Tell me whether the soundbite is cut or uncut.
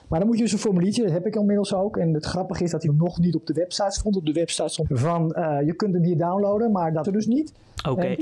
cut